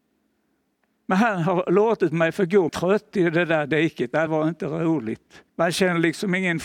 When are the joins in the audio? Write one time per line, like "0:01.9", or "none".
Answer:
0:02.7
0:04.3
0:05.5